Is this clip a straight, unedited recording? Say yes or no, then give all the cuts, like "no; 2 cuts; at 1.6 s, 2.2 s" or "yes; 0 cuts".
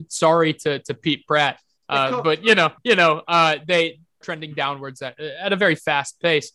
no; 2 cuts; at 2.8 s, 4.2 s